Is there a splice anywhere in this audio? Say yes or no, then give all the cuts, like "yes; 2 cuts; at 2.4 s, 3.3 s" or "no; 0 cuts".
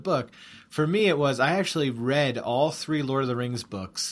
no; 0 cuts